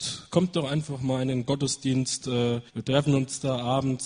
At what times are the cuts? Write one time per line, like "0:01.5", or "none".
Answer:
0:02.7